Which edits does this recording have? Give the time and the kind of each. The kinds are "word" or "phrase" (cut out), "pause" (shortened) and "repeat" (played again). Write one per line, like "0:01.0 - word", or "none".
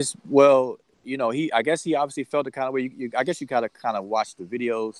none